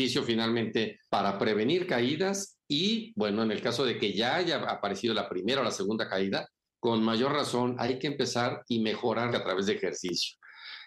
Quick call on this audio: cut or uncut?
cut